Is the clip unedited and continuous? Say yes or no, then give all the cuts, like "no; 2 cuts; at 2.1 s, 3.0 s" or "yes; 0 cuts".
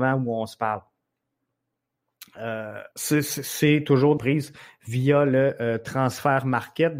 no; 2 cuts; at 2.9 s, 4.2 s